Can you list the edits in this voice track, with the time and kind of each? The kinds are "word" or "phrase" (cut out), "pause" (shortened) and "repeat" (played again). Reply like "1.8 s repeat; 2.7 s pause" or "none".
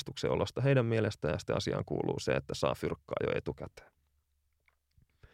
none